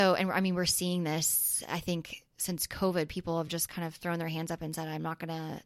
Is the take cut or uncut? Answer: uncut